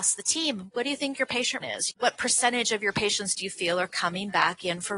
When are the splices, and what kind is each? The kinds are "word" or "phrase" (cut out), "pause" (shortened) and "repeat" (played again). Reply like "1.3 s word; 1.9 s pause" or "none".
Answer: 1.6 s word

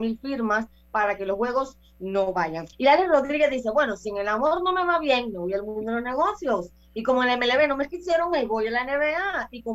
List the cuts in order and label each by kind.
2.7 s pause

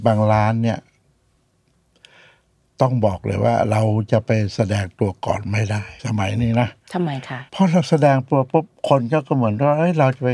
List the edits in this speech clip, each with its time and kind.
6.0 s pause; 7.5 s pause

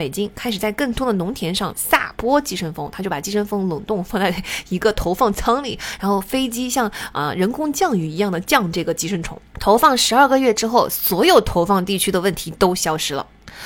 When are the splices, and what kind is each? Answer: 9.5 s pause

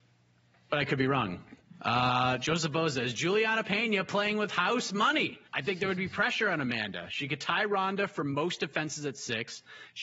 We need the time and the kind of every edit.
5.5 s pause

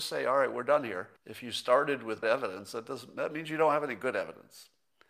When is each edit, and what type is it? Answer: 1.2 s pause; 2.2 s word

